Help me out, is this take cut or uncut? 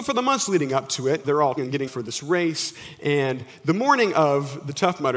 cut